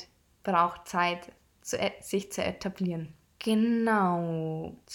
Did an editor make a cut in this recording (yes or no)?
no